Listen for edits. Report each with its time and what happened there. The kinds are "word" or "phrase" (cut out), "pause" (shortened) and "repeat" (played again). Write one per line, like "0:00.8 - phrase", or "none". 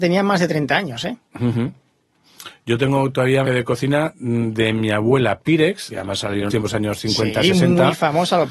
0:01.3 - pause
0:03.4 - word
0:05.9 - phrase
0:06.5 - word